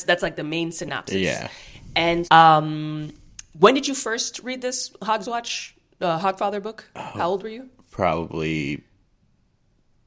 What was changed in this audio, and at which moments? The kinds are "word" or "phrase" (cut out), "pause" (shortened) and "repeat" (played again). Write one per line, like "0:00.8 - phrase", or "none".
0:02.2 - word